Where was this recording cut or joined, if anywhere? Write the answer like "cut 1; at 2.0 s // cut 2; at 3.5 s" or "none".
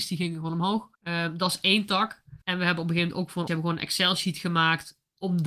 cut 1; at 0.9 s // cut 2; at 2.4 s // cut 3; at 3.5 s